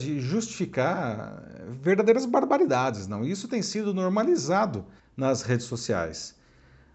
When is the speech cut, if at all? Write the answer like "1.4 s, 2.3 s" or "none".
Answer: 5.0 s